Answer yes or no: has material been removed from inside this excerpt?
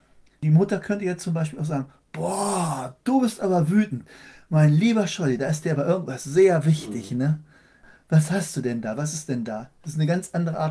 no